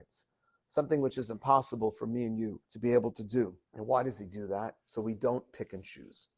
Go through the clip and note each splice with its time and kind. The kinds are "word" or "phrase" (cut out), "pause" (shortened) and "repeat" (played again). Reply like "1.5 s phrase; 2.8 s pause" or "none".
2.6 s pause; 3.6 s pause; 4.8 s pause